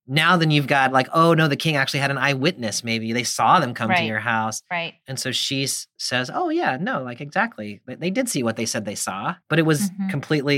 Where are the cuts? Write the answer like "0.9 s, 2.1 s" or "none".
9.4 s